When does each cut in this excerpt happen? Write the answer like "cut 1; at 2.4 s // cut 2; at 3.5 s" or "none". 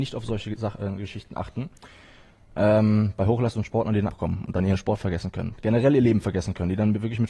cut 1; at 4.1 s

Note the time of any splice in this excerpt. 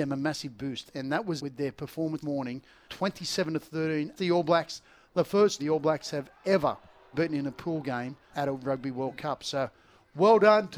cut 1; at 1.4 s // cut 2; at 2.2 s // cut 3; at 2.9 s // cut 4; at 4.2 s // cut 5; at 5.6 s // cut 6; at 7.1 s // cut 7; at 8.3 s

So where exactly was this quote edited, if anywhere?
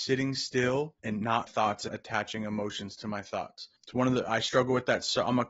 cut 1; at 1.0 s // cut 2; at 1.5 s // cut 3; at 1.9 s // cut 4; at 3.8 s

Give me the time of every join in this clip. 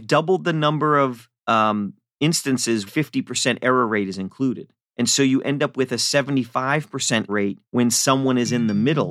cut 1; at 1.4 s // cut 2; at 2.9 s // cut 3; at 4.8 s // cut 4; at 7.3 s // cut 5; at 7.6 s

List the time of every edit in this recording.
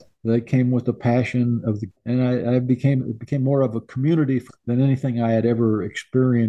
cut 1; at 1.9 s // cut 2; at 3.0 s // cut 3; at 4.5 s

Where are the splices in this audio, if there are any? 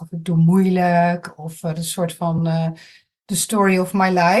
none

